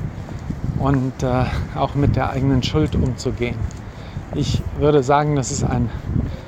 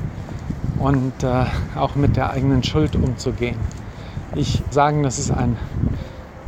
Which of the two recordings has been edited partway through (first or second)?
second